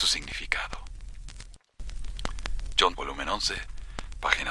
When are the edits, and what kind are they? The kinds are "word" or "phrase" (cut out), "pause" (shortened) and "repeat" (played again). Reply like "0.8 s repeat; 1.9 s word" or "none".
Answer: 2.9 s phrase